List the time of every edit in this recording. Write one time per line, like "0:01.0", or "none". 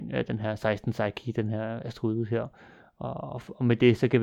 none